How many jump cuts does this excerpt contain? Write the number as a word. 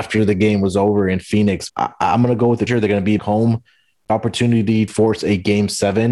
five